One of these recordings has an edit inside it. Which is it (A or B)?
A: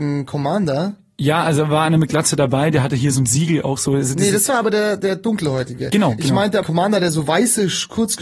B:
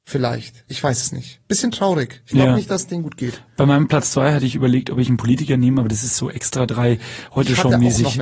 A